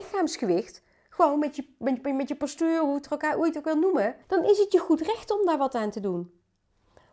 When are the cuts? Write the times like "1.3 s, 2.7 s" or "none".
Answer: 4.2 s